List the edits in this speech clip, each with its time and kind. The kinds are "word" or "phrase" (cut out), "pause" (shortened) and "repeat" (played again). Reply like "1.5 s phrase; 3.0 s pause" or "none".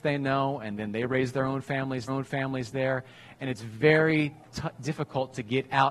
2.1 s repeat